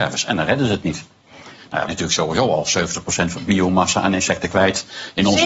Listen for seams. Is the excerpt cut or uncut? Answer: cut